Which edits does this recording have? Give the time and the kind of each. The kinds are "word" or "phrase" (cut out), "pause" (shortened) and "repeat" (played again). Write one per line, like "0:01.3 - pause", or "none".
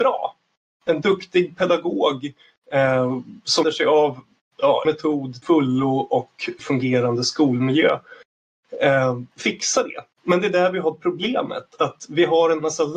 0:03.6 - word
0:04.8 - word
0:05.4 - word
0:06.6 - phrase
0:09.3 - pause